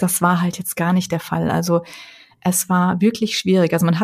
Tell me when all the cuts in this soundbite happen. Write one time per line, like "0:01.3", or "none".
none